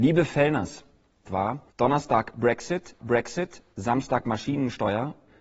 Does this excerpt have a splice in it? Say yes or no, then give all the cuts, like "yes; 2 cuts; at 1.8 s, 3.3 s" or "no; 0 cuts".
yes; 3 cuts; at 1.2 s, 1.7 s, 3.0 s